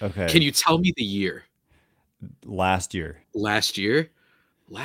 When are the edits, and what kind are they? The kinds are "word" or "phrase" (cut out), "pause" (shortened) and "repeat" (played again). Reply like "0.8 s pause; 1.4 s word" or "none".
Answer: 3.2 s pause